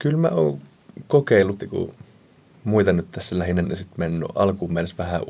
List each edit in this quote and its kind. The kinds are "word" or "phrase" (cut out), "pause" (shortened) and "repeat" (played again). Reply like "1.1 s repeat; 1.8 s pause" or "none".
1.6 s word; 3.6 s word